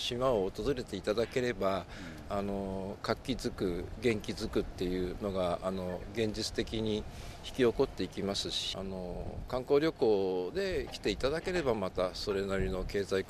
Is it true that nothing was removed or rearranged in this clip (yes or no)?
no